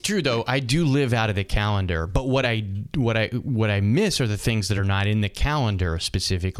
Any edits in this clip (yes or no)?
no